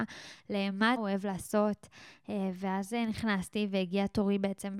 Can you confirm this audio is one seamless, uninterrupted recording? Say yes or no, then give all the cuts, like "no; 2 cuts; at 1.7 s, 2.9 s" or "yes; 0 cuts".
no; 1 cut; at 1.0 s